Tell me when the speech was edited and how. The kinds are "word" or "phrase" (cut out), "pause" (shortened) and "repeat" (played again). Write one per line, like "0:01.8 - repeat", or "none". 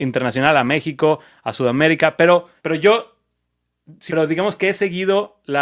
0:02.6 - pause
0:04.1 - word